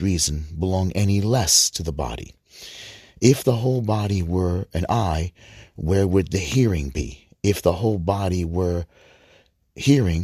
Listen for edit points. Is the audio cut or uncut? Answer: uncut